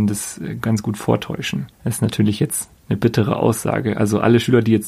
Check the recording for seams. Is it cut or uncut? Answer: cut